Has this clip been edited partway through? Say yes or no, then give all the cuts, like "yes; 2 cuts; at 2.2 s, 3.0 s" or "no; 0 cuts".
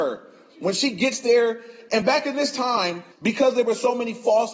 yes; 1 cut; at 3.1 s